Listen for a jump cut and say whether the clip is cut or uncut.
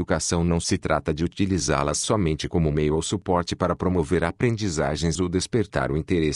uncut